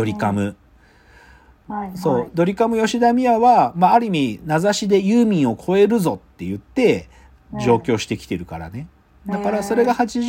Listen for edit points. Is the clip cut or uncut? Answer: uncut